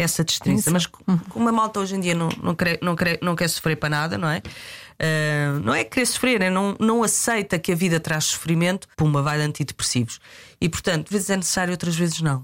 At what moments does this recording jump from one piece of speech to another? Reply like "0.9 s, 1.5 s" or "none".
3.0 s, 8.9 s, 11.1 s